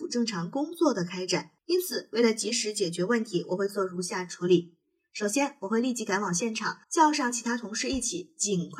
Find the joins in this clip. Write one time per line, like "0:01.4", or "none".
0:01.6
0:06.8